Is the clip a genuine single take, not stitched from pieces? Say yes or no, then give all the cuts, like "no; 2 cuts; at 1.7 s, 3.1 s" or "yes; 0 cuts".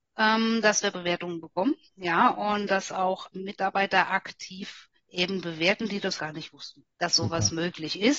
no; 6 cuts; at 0.9 s, 1.8 s, 3.3 s, 5.0 s, 6.2 s, 6.9 s